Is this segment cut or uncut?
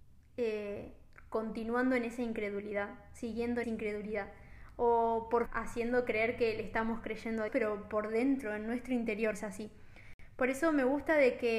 cut